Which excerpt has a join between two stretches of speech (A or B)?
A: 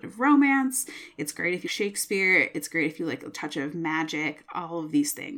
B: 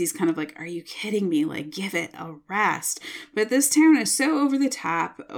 A